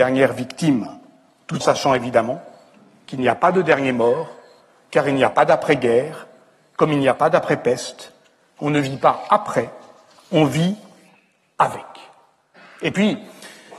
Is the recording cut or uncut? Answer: cut